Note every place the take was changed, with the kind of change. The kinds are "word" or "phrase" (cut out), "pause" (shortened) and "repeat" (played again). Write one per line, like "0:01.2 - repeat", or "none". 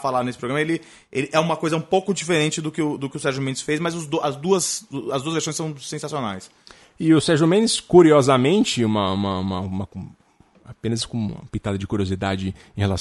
none